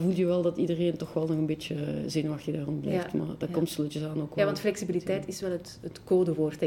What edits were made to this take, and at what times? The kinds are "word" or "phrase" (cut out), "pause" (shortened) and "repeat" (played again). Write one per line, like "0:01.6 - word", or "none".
none

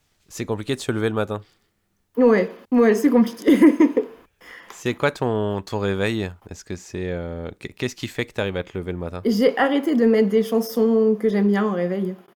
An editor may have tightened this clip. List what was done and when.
0:02.6 - pause
0:06.4 - pause

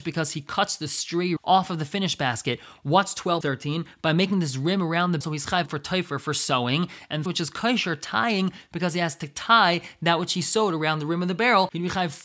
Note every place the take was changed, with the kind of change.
0:01.4 - word
0:03.4 - word
0:05.2 - word
0:05.7 - word
0:07.3 - word

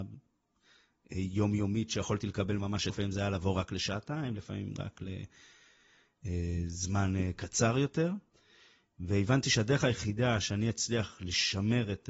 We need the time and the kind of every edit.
0:02.9 - phrase

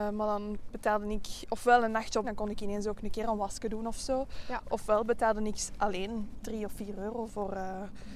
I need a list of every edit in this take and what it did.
0:02.2 - phrase

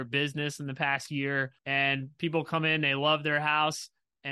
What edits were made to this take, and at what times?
0:01.6 - pause

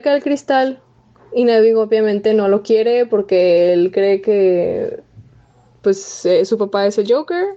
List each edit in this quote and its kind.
none

